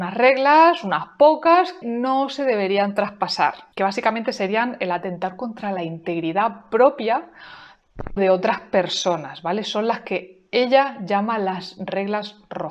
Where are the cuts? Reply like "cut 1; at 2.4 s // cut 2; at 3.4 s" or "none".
cut 1; at 1.8 s // cut 2; at 3.7 s // cut 3; at 8.2 s